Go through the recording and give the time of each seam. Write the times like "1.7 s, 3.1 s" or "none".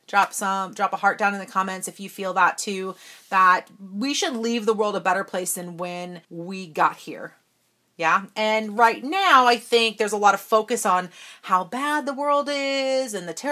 6.2 s